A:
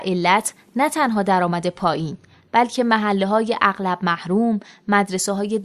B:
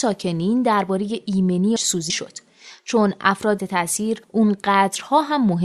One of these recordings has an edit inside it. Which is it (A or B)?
B